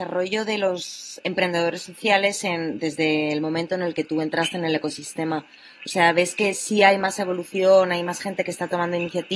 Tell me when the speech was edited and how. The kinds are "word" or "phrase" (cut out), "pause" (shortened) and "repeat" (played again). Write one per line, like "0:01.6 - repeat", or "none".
none